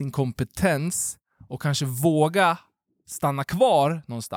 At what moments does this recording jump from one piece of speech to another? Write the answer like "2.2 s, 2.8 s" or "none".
none